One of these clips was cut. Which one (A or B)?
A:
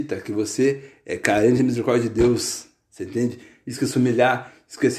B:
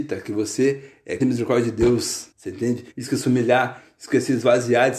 B